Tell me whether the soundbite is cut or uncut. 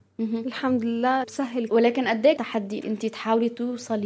cut